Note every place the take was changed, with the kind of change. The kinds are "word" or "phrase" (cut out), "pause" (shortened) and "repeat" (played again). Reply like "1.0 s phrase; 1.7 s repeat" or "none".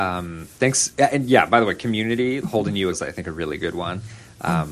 2.4 s word; 2.9 s word